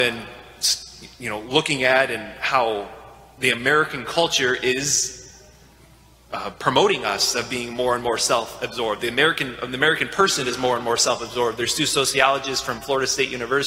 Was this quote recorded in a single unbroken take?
yes; 0 cuts

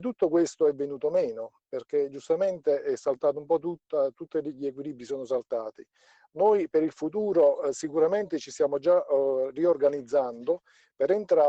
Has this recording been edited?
no; 0 cuts

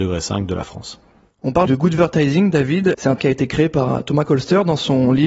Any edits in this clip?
yes; 2 cuts; at 1.7 s, 3.2 s

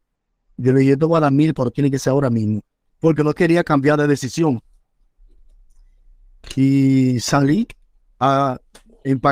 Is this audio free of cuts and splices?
yes; 0 cuts

